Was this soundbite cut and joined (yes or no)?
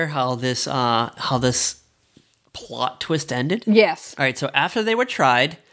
no